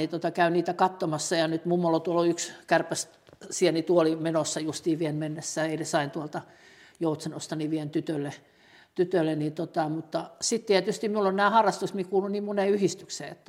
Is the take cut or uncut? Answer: uncut